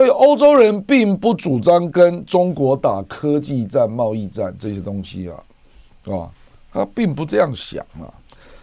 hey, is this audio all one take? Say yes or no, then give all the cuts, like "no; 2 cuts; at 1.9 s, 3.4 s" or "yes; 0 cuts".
yes; 0 cuts